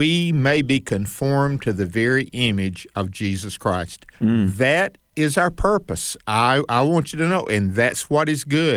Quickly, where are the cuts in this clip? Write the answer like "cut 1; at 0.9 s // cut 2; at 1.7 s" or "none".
cut 1; at 4.1 s